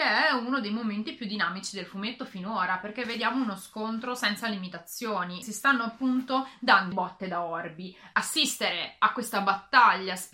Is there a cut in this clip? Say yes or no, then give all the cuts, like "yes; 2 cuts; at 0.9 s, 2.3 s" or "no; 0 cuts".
yes; 1 cut; at 6.9 s